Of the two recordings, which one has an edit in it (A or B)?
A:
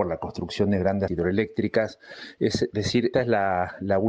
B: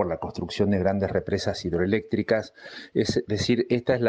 A